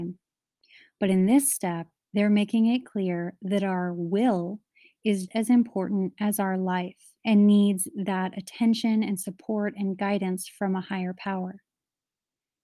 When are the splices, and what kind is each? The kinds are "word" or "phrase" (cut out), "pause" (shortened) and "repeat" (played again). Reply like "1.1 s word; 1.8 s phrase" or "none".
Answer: 5.3 s word; 7.2 s pause